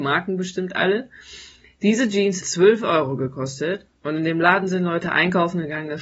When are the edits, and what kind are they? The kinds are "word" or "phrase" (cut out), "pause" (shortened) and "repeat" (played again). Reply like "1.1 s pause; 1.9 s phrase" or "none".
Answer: 2.4 s word

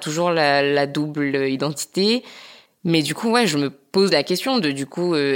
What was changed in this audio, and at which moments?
none

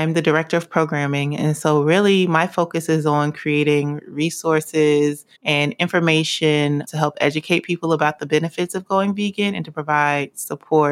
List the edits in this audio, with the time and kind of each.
5.3 s pause

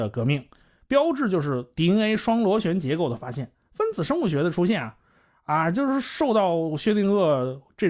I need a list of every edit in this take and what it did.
none

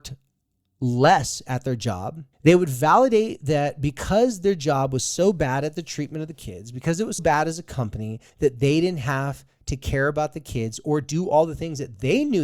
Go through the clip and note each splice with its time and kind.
2.3 s pause; 7.2 s word; 8.3 s pause

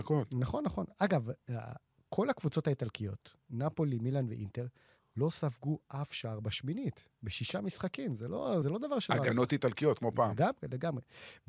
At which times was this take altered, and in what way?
8.6 s word

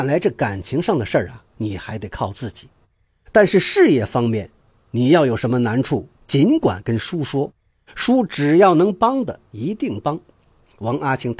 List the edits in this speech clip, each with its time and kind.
none

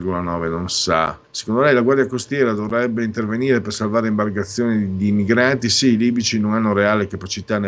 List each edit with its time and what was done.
1.2 s pause

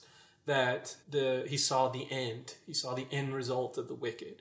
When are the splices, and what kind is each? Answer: 1.0 s pause

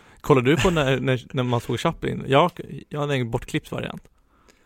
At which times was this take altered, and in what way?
none

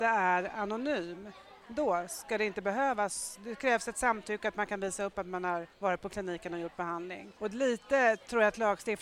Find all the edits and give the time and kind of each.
5.7 s pause; 7.4 s pause

